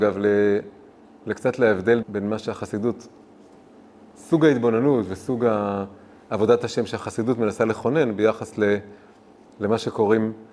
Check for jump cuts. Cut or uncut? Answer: cut